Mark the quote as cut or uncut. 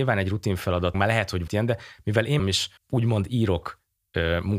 cut